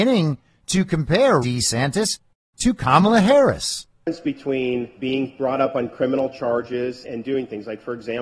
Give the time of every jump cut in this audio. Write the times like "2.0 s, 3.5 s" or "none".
1.4 s, 5.0 s, 7.0 s